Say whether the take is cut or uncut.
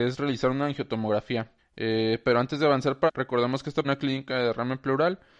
cut